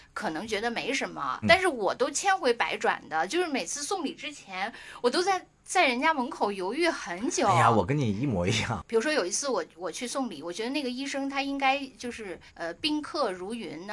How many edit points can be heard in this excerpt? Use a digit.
2